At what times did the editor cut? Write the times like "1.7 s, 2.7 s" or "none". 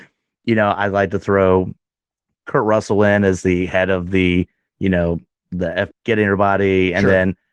5.9 s